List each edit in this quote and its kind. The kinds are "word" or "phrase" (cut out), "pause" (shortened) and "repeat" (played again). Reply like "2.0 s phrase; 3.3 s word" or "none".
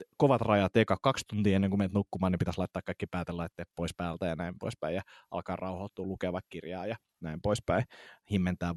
none